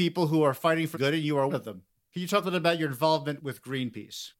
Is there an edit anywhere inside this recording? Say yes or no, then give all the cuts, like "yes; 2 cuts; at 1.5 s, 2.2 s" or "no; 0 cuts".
yes; 4 cuts; at 0.9 s, 1.5 s, 2.4 s, 3.4 s